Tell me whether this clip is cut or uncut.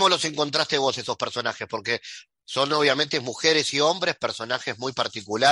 uncut